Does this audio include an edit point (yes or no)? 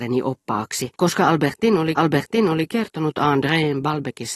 yes